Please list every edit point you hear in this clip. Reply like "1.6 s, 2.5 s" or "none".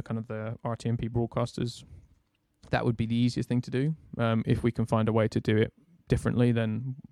none